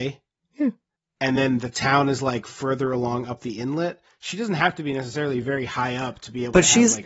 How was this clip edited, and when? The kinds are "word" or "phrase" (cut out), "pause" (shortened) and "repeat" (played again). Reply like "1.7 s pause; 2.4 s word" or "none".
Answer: none